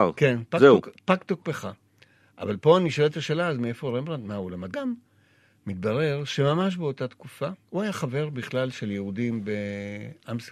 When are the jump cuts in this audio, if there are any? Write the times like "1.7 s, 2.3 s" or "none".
4.7 s, 7.6 s

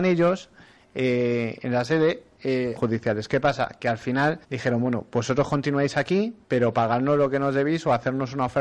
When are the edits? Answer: 2.8 s, 4.4 s, 6.4 s

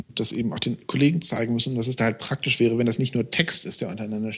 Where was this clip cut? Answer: none

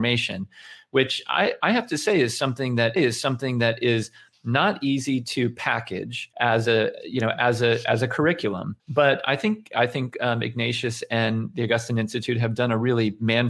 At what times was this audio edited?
3.0 s, 6.3 s, 8.8 s

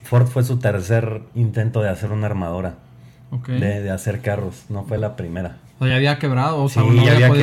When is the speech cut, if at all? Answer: none

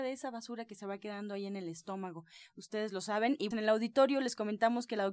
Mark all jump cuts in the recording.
3.5 s

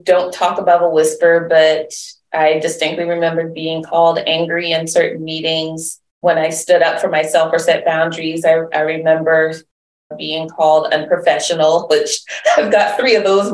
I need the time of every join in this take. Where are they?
none

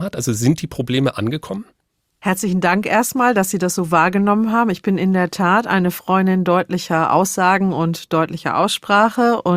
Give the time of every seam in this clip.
none

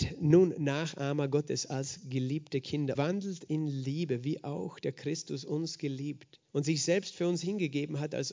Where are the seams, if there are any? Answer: 2.9 s, 6.5 s

